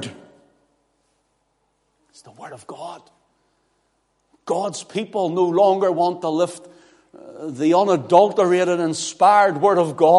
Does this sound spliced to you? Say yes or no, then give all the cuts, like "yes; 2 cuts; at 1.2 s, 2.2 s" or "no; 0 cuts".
no; 0 cuts